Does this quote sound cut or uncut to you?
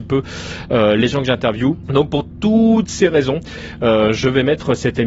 uncut